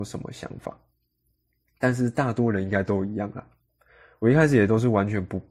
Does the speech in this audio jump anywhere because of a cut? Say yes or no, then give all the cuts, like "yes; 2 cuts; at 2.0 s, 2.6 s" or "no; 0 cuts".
no; 0 cuts